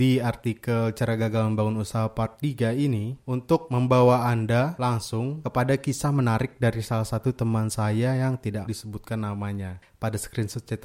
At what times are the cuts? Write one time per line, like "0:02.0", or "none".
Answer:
0:08.7